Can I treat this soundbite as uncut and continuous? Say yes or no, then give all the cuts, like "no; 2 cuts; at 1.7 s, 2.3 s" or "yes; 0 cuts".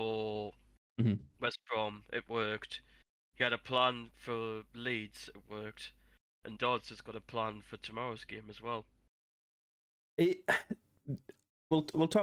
no; 1 cut; at 6.6 s